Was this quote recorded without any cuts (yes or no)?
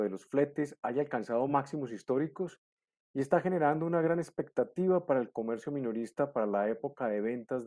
yes